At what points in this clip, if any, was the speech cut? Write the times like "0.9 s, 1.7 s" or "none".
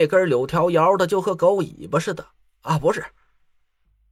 none